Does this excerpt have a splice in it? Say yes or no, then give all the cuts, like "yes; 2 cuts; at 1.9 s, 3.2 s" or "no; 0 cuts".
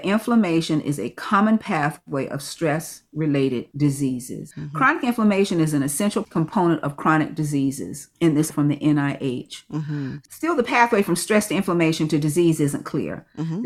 yes; 1 cut; at 8.5 s